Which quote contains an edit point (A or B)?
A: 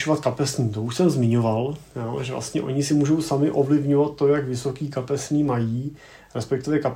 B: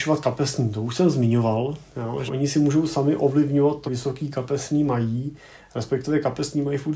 B